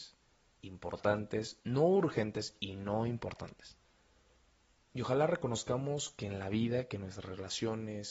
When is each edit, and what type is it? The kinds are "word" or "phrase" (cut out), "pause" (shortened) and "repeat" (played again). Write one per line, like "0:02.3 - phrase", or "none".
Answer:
none

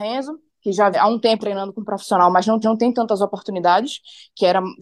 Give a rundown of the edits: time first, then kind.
0:00.9 - phrase
0:01.4 - word
0:02.6 - repeat

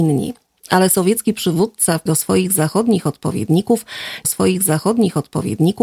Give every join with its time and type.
0:02.1 - word
0:04.2 - repeat

